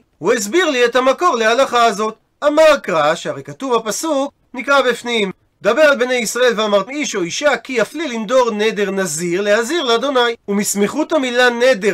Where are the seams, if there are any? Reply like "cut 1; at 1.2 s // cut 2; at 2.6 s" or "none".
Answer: cut 1; at 6.9 s